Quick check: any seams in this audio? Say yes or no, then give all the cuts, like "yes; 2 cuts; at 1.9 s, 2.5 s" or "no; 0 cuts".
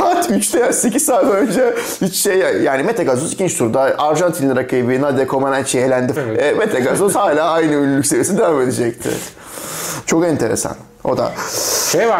yes; 1 cut; at 6.2 s